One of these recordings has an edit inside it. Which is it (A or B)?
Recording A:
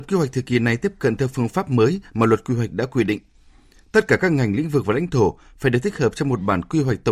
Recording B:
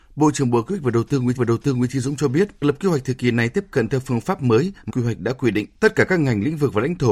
B